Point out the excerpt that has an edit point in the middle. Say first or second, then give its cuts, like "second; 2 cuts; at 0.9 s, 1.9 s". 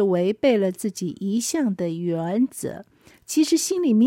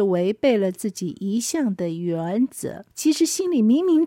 second; 1 cut; at 2.9 s